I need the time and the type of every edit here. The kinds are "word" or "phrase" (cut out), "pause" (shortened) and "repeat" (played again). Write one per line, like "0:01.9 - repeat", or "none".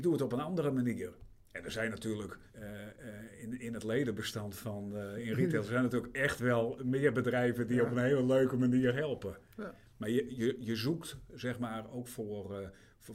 0:02.5 - pause